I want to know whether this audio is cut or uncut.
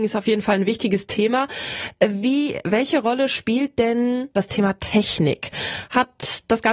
uncut